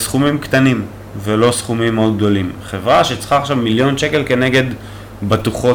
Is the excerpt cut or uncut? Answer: uncut